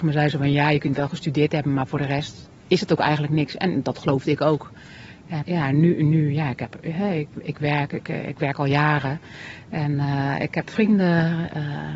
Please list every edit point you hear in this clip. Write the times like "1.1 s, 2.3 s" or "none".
5.4 s